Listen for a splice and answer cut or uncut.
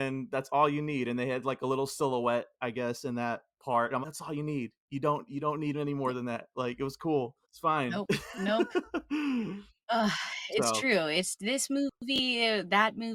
cut